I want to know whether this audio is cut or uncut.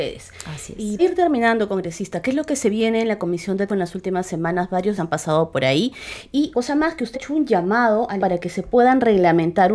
cut